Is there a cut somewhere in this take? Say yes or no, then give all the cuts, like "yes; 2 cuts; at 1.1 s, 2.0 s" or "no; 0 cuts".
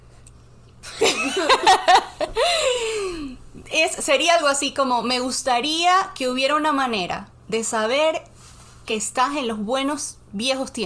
no; 0 cuts